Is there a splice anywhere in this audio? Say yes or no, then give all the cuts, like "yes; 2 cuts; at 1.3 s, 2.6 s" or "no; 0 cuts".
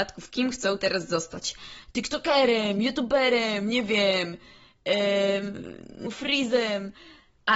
yes; 1 cut; at 6.1 s